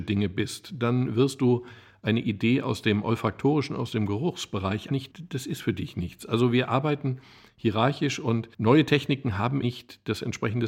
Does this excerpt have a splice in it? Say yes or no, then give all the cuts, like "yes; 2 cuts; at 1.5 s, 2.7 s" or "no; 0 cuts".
yes; 2 cuts; at 4.9 s, 9.6 s